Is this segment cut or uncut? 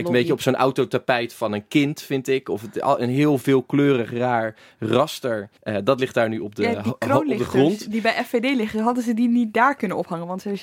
cut